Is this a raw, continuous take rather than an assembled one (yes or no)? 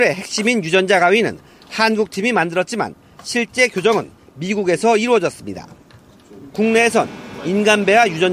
yes